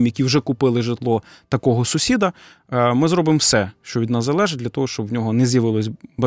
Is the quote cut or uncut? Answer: uncut